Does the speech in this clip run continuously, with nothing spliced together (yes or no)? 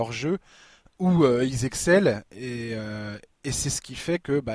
yes